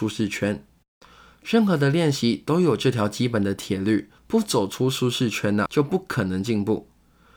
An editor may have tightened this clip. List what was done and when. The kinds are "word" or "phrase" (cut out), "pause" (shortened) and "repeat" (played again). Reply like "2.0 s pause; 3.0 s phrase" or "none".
4.2 s pause; 5.7 s word